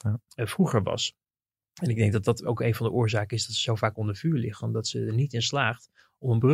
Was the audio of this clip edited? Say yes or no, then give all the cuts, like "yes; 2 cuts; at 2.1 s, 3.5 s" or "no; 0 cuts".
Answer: no; 0 cuts